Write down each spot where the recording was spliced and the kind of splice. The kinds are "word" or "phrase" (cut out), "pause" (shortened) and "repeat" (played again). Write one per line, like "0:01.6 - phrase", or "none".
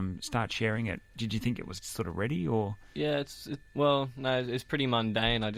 0:03.7 - pause